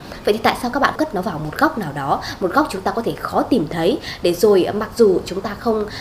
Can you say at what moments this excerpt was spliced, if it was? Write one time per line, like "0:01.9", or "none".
0:01.0